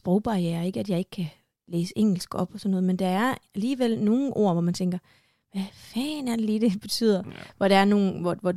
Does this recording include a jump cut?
no; 0 cuts

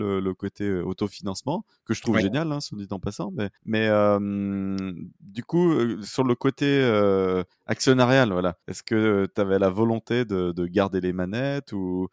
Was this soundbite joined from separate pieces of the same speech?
yes; 3 cuts; at 3.6 s, 7.5 s, 8.6 s

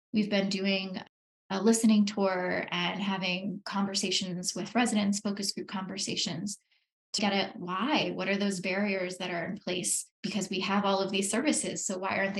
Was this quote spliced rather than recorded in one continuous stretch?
yes; 2 cuts; at 7.2 s, 10.1 s

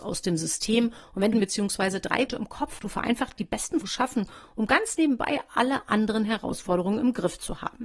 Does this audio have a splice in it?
yes; 5 cuts; at 1.3 s, 2.3 s, 2.8 s, 3.4 s, 3.8 s

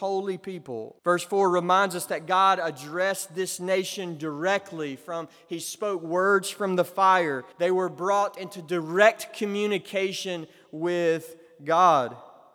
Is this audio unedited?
no; 2 cuts; at 1.0 s, 7.5 s

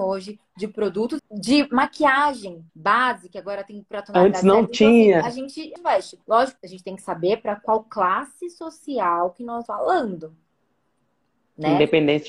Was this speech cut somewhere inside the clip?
yes; 6 cuts; at 1.2 s, 2.7 s, 5.8 s, 6.2 s, 6.6 s, 9.7 s

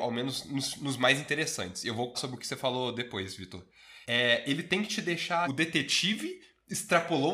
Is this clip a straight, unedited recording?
no; 3 cuts; at 2.1 s, 4.0 s, 5.5 s

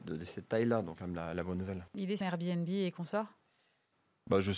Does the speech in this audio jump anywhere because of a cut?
yes; 3 cuts; at 1.0 s, 1.9 s, 2.2 s

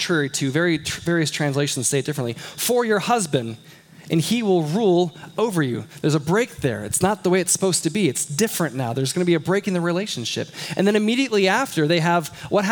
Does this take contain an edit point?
no; 0 cuts

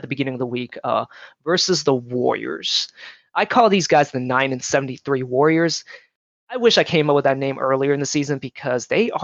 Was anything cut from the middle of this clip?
no; 0 cuts

